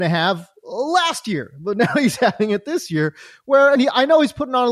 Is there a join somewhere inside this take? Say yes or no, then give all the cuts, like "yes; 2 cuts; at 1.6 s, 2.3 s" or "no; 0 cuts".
yes; 1 cut; at 3.8 s